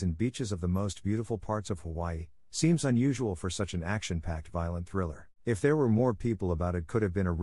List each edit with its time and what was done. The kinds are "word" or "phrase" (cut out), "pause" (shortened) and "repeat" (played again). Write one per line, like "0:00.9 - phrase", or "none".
0:05.3 - pause